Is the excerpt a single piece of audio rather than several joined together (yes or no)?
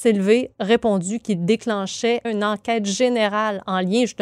no